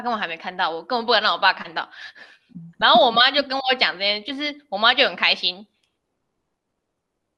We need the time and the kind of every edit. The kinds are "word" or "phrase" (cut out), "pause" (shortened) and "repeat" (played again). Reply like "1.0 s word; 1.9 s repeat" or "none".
2.7 s pause